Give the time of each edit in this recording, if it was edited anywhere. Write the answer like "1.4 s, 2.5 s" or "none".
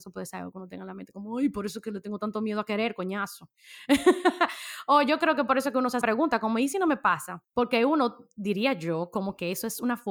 6.0 s, 7.4 s